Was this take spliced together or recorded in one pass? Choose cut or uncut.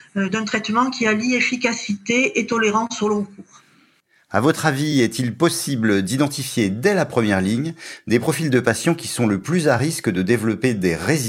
uncut